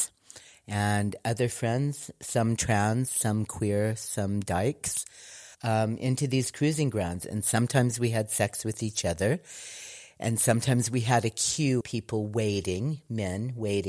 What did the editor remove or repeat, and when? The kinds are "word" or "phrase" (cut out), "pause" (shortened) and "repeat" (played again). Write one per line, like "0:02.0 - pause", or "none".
0:05.5 - pause
0:11.8 - word